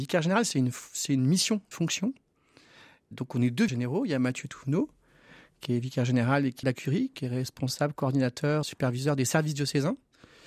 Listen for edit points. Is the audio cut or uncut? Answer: cut